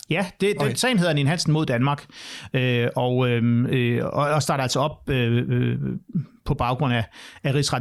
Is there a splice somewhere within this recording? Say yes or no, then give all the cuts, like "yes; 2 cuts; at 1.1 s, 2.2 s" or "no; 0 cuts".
no; 0 cuts